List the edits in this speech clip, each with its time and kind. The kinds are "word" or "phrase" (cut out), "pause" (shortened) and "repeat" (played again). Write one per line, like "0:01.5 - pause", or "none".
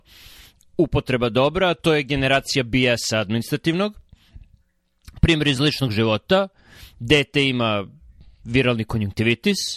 none